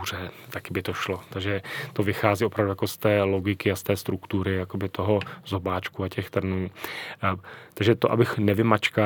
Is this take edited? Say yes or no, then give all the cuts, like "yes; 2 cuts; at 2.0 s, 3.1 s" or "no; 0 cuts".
no; 0 cuts